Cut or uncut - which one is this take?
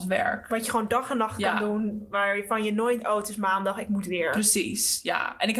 cut